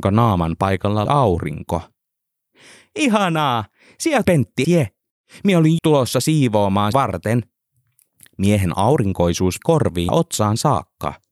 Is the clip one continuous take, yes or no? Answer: no